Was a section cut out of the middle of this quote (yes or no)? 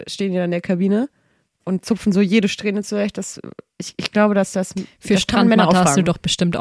no